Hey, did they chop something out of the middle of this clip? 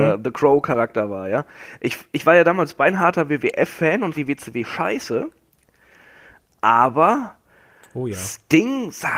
yes; 1 cut; at 4.1 s

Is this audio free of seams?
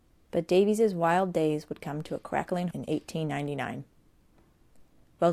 no; 1 cut; at 2.7 s

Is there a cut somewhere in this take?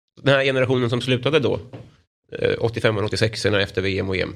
no; 0 cuts

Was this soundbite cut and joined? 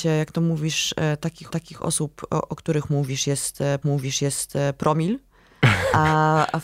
yes; 2 cuts; at 1.5 s, 3.8 s

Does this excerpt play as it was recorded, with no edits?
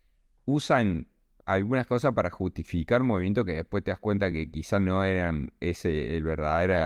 yes; 0 cuts

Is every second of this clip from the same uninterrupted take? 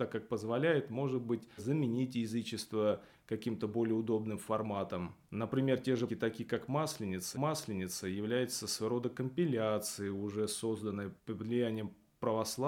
no; 5 cuts; at 1.6 s, 5.2 s, 6.1 s, 7.3 s, 11.2 s

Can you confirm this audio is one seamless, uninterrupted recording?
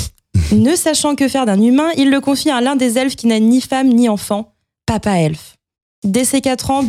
yes; 0 cuts

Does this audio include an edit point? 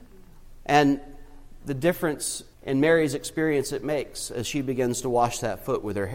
yes; 1 cut; at 2.5 s

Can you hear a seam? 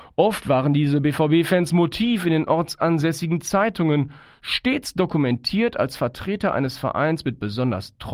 no; 0 cuts

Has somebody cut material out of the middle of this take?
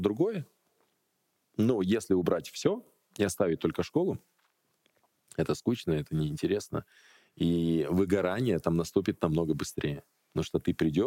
no; 0 cuts

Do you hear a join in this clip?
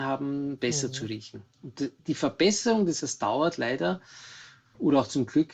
yes; 1 cut; at 3.0 s

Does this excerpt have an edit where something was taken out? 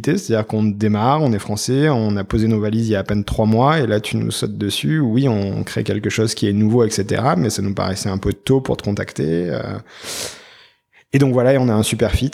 no; 0 cuts

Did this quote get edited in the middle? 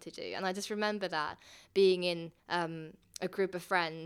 yes; 1 cut; at 2.4 s

